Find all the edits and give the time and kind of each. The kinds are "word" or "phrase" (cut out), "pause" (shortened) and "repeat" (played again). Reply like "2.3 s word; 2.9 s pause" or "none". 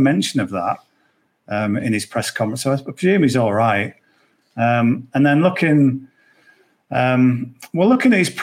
none

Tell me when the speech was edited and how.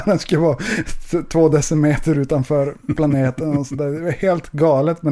none

